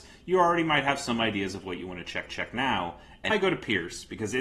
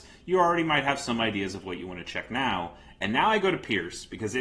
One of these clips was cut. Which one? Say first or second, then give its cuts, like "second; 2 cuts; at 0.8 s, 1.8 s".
first; 2 cuts; at 2.3 s, 3.3 s